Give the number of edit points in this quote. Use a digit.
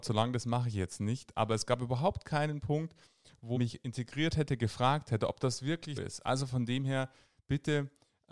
2